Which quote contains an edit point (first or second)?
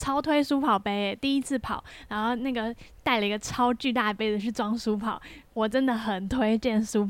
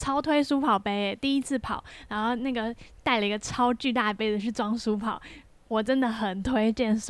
first